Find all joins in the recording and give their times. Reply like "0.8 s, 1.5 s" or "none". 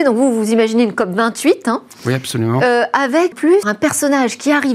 3.3 s, 3.6 s